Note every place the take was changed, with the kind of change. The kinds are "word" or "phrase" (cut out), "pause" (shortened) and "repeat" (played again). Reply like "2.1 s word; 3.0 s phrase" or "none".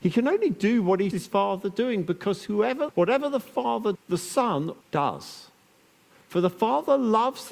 1.1 s word; 2.9 s word; 3.9 s word; 4.8 s word